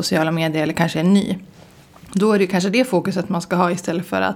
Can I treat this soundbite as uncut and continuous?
yes; 0 cuts

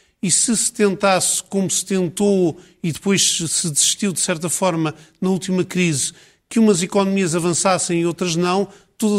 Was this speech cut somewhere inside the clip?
no; 0 cuts

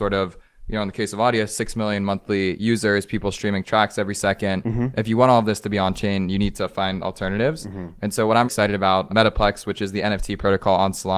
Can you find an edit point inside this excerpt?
yes; 2 cuts; at 8.5 s, 9.1 s

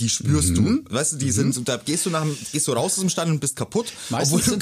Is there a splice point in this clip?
no; 0 cuts

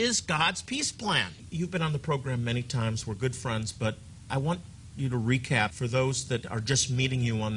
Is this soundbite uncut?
yes; 0 cuts

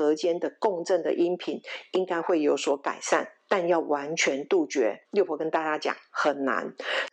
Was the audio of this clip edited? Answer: yes; 1 cut; at 5.0 s

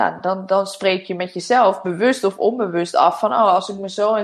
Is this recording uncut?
yes; 0 cuts

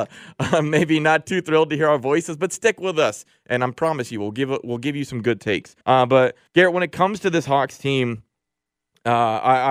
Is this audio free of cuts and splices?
no; 2 cuts; at 5.8 s, 6.5 s

